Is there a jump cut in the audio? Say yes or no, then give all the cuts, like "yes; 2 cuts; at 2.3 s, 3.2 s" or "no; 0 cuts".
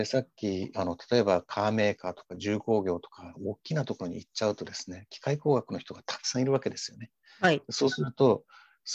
no; 0 cuts